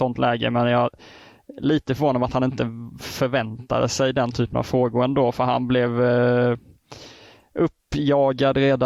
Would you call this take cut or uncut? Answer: uncut